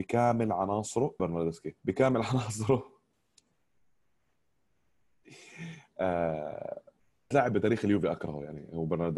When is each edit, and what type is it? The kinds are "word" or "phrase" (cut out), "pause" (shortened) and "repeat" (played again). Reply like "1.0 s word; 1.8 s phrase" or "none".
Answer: 1.2 s word; 1.8 s pause; 7.3 s word